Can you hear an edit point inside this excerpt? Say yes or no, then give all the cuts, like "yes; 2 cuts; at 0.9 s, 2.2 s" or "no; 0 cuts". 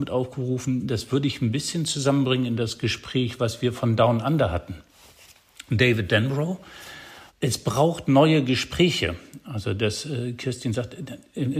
no; 0 cuts